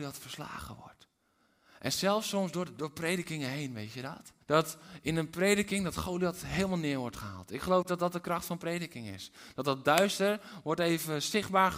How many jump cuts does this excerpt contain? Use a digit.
1